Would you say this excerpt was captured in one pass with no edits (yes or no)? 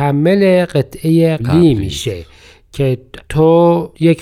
no